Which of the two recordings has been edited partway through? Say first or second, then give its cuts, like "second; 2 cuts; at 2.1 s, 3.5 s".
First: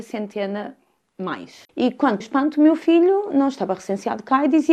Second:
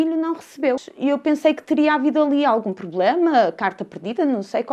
first; 1 cut; at 2.2 s